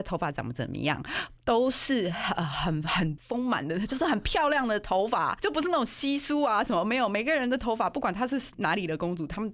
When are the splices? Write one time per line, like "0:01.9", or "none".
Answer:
0:01.4